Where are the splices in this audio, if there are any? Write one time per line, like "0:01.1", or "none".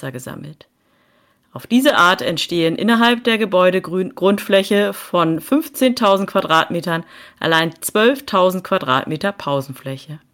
none